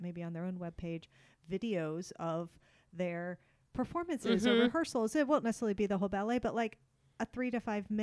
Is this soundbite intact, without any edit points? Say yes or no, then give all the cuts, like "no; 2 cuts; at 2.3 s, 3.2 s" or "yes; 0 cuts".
yes; 0 cuts